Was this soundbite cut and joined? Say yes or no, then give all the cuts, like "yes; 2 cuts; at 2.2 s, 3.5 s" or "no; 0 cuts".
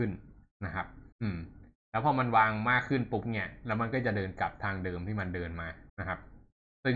yes; 2 cuts; at 1.1 s, 5.9 s